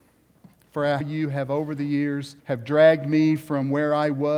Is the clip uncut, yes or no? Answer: no